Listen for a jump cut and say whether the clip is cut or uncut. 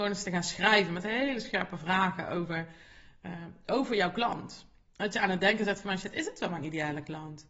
uncut